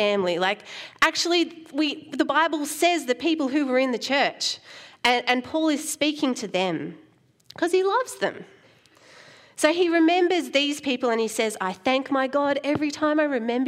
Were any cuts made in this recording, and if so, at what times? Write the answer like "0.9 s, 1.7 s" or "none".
none